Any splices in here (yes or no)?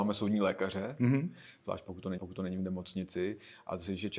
yes